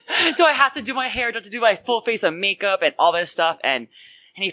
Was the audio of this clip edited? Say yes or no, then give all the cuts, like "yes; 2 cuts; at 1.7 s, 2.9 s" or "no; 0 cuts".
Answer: no; 0 cuts